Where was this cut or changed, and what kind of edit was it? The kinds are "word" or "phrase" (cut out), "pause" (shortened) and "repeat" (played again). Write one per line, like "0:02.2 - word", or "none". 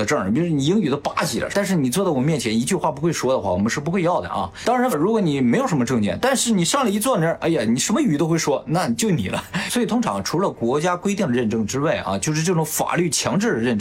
0:04.9 - phrase